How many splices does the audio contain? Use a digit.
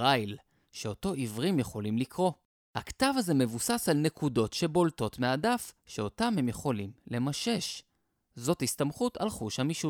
0